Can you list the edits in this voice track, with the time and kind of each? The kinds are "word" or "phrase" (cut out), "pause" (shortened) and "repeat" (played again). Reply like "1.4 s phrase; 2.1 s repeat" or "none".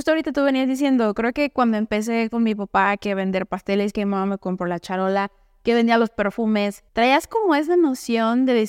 6.9 s pause